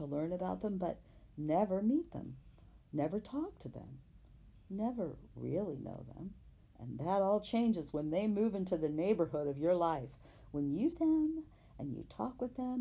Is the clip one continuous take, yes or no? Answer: no